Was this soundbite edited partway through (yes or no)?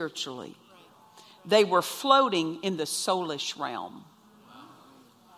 no